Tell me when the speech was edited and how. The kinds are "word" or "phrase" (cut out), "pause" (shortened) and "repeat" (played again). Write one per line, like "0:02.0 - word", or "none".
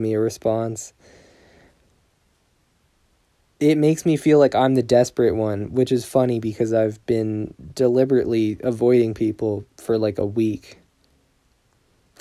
none